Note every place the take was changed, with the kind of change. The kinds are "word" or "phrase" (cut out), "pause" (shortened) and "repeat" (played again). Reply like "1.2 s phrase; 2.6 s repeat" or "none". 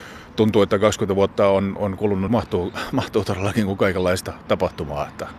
2.3 s phrase